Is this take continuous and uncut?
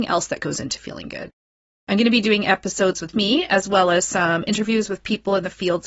no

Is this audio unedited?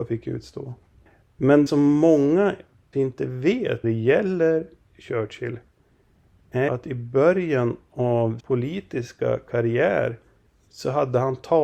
no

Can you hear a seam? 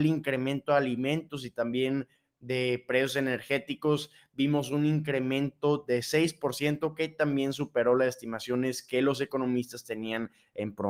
no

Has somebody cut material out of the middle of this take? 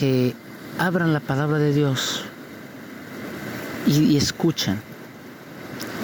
no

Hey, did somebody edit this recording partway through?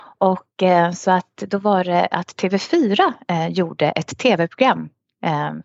no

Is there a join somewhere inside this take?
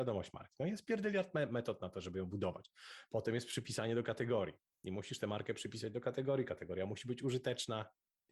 no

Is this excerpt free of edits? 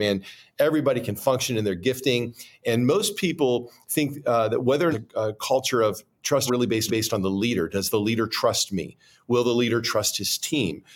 no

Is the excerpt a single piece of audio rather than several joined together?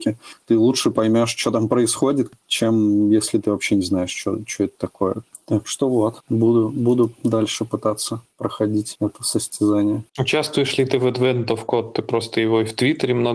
no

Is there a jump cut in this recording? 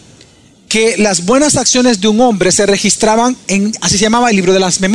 no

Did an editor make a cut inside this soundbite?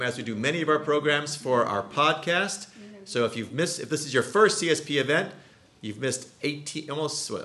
no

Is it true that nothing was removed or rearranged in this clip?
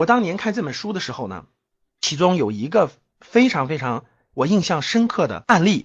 yes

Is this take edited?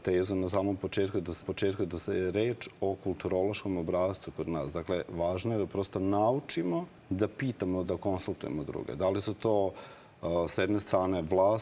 yes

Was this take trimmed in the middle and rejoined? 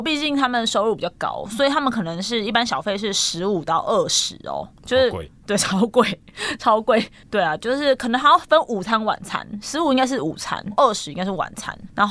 no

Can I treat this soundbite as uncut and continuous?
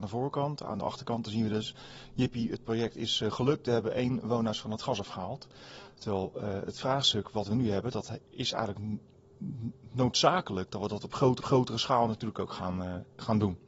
no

